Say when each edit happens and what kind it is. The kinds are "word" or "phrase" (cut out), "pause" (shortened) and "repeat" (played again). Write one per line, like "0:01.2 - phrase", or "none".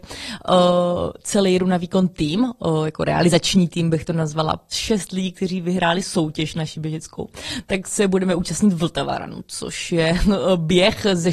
0:04.7 - word